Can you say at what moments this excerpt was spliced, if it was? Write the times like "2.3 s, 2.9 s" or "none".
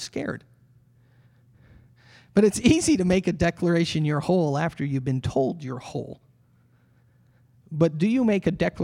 none